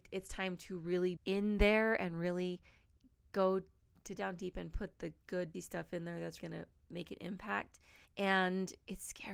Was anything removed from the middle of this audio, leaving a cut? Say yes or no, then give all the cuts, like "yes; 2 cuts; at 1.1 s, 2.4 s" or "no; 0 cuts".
yes; 5 cuts; at 1.2 s, 4.2 s, 4.9 s, 5.5 s, 6.4 s